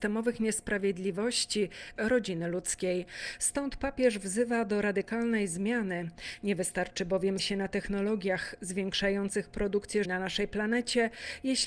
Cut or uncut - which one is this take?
cut